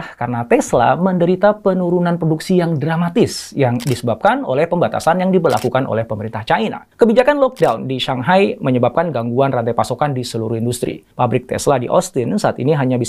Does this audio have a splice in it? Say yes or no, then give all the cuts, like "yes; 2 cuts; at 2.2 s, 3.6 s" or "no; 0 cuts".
yes; 2 cuts; at 6.9 s, 11.1 s